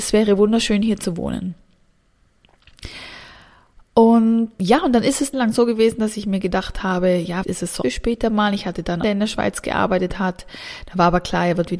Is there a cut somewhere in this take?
yes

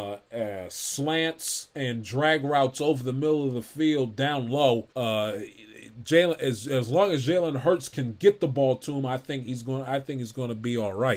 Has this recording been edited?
yes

